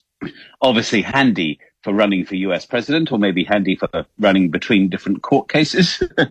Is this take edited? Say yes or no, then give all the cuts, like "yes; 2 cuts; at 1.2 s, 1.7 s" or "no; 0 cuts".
no; 0 cuts